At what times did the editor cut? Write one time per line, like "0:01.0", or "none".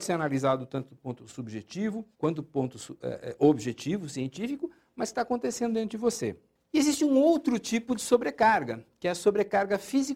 0:02.1